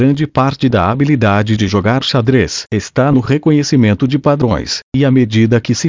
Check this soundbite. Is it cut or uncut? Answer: uncut